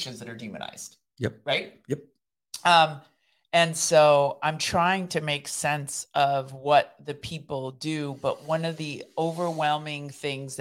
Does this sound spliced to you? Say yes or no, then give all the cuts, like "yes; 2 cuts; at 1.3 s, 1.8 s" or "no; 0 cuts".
no; 0 cuts